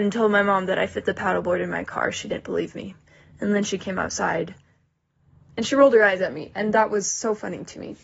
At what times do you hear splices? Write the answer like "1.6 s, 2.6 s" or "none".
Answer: none